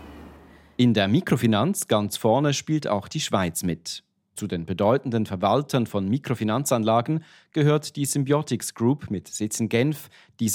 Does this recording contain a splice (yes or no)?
no